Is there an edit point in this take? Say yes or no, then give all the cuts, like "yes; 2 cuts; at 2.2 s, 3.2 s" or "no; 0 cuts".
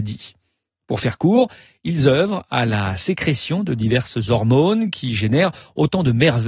no; 0 cuts